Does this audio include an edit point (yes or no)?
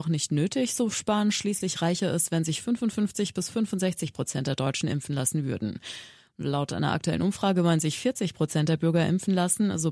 no